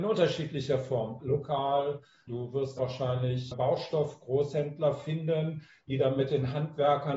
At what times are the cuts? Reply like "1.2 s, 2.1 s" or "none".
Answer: 1.2 s, 2.3 s, 2.8 s, 3.5 s